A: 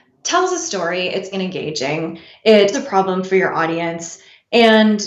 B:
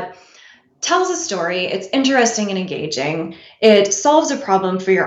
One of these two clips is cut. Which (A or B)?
A